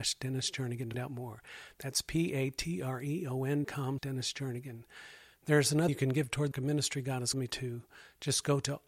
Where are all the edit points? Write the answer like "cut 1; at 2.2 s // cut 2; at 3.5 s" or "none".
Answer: cut 1; at 0.9 s // cut 2; at 3.6 s // cut 3; at 4.0 s // cut 4; at 5.9 s // cut 5; at 6.5 s // cut 6; at 7.3 s